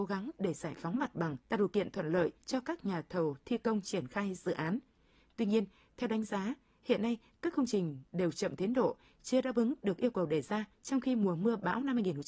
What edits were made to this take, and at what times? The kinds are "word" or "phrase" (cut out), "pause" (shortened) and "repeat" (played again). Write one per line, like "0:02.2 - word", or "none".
0:01.4 - pause
0:02.4 - pause
0:10.7 - pause